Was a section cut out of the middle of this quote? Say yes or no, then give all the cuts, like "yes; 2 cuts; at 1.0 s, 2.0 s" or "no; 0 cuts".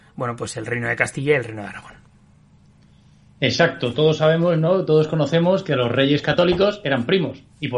no; 0 cuts